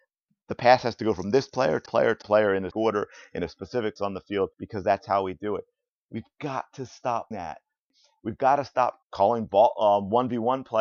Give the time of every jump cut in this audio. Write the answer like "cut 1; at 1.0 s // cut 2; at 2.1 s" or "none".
cut 1; at 1.9 s // cut 2; at 2.2 s // cut 3; at 2.7 s // cut 4; at 4.0 s // cut 5; at 4.5 s // cut 6; at 7.3 s // cut 7; at 9.0 s